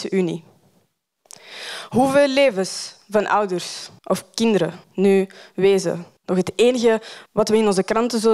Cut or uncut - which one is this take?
cut